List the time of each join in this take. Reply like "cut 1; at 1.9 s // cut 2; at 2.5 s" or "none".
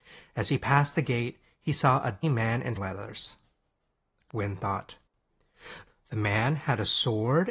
cut 1; at 2.2 s // cut 2; at 2.8 s // cut 3; at 4.3 s